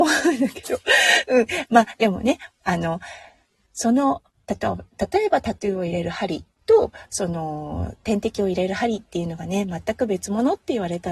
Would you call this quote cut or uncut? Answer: uncut